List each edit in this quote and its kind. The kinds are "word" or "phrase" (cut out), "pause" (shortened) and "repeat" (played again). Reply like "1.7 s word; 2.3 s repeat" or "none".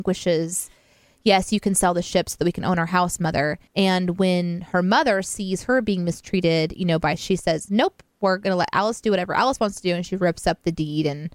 3.7 s pause; 7.2 s word